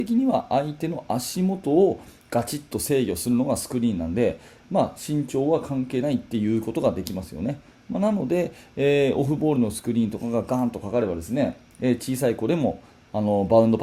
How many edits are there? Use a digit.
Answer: 0